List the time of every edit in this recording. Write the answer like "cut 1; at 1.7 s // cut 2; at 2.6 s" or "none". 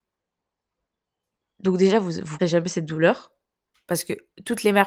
cut 1; at 2.4 s

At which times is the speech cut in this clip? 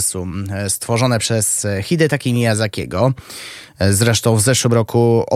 none

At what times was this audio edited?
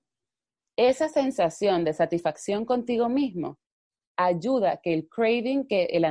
none

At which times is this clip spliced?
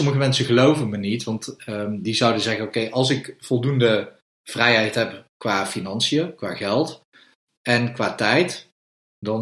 none

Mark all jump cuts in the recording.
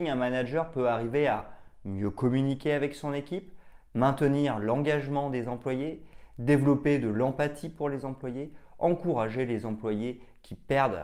none

